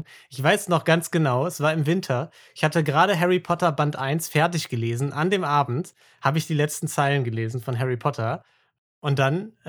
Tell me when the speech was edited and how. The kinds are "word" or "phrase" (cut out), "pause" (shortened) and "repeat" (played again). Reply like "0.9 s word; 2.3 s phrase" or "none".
none